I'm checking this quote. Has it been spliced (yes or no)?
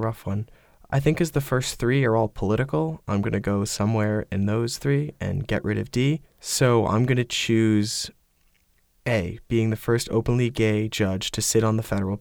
yes